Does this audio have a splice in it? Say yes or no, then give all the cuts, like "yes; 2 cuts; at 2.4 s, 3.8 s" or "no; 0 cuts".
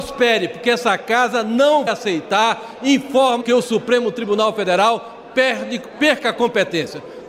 yes; 2 cuts; at 1.9 s, 3.4 s